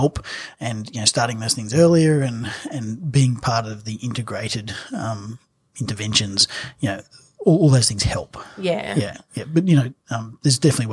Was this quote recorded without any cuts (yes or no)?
yes